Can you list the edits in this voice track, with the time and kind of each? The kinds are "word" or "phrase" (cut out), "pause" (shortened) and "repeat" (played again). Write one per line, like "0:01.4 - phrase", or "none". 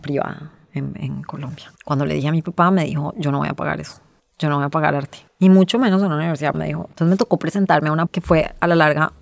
0:01.8 - pause
0:04.2 - pause
0:05.3 - pause
0:06.5 - word
0:06.9 - pause
0:08.1 - word